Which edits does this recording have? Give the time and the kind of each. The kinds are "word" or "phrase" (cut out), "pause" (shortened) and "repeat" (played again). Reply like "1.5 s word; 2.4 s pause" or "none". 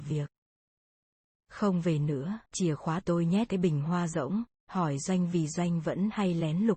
2.5 s pause; 3.0 s word; 3.5 s word